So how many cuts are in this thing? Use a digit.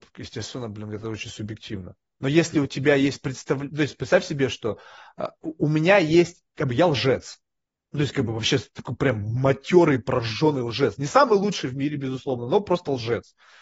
0